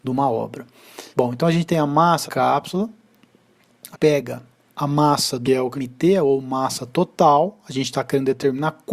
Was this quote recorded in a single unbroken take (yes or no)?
no